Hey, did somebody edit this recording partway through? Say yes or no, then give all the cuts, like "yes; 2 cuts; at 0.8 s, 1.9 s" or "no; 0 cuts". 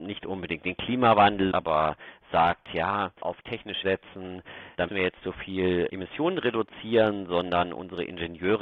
yes; 5 cuts; at 1.5 s, 3.2 s, 3.8 s, 4.9 s, 5.2 s